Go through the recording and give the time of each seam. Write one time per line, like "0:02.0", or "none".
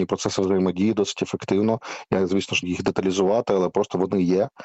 0:02.6